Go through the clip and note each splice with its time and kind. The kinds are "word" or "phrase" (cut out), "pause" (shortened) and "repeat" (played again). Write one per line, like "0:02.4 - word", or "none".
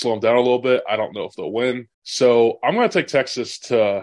0:01.9 - pause